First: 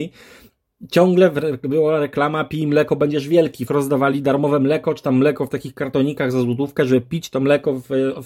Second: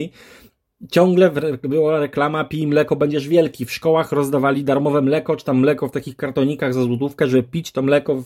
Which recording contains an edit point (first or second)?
first